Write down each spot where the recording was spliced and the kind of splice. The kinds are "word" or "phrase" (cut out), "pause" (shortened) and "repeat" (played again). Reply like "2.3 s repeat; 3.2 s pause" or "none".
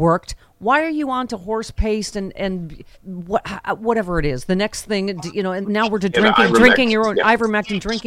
2.9 s pause; 5.6 s word